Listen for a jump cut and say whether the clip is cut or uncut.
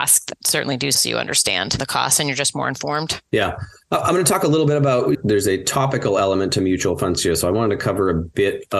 cut